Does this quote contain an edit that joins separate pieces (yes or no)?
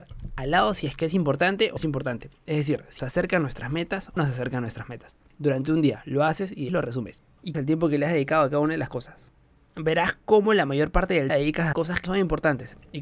yes